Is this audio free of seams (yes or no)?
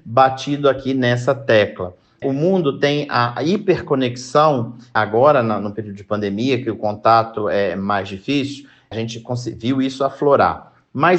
yes